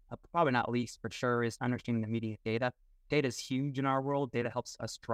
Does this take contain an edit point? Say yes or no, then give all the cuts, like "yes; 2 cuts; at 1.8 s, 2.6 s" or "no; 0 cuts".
yes; 1 cut; at 1.6 s